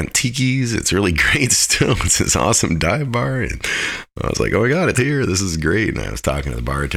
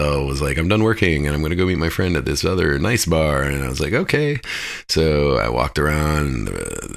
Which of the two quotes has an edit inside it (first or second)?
first